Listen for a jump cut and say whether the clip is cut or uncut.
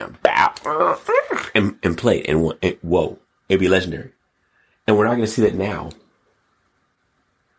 uncut